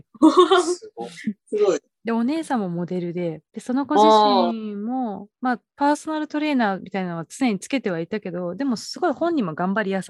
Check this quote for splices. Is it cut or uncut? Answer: cut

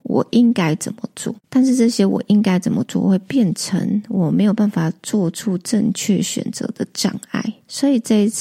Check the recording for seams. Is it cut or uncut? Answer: cut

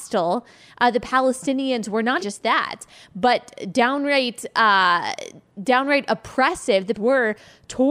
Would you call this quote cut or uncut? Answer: cut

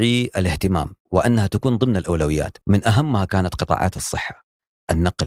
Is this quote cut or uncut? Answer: cut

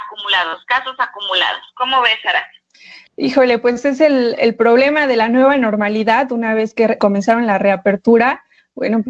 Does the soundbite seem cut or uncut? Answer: cut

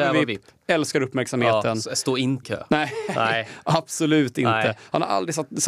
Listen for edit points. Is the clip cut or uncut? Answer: cut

